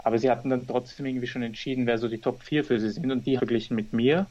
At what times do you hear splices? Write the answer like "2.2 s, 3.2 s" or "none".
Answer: 3.4 s